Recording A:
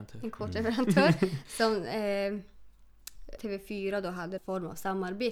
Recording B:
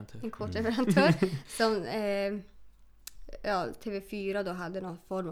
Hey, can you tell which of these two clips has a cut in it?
A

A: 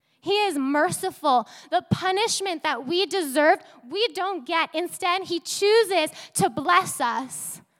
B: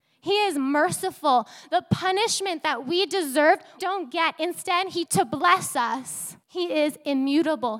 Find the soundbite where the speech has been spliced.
B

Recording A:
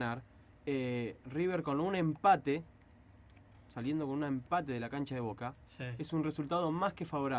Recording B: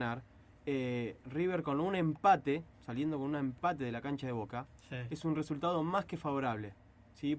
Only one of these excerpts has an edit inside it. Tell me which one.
B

